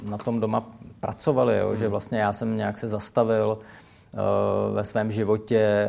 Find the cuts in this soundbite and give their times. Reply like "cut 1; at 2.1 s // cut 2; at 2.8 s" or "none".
none

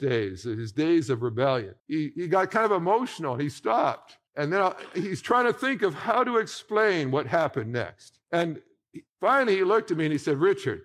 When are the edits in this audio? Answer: cut 1; at 1.8 s // cut 2; at 4.3 s // cut 3; at 8.2 s

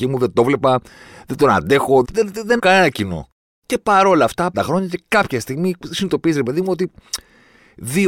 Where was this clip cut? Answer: cut 1; at 2.0 s // cut 2; at 2.6 s // cut 3; at 4.5 s

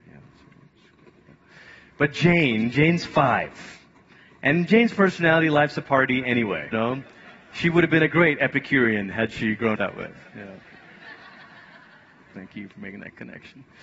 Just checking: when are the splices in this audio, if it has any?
cut 1; at 6.7 s // cut 2; at 9.8 s

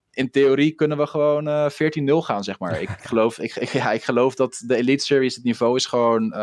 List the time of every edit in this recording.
cut 1; at 3.0 s

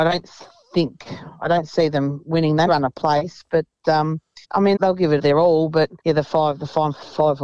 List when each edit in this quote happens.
cut 1; at 2.7 s // cut 2; at 4.4 s // cut 3; at 4.8 s // cut 4; at 5.2 s // cut 5; at 6.0 s

